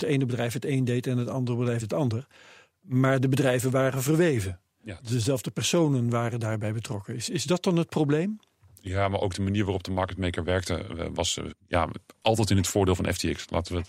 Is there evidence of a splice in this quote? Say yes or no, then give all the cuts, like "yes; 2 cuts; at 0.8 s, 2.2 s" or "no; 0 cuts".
yes; 2 cuts; at 1.8 s, 11.5 s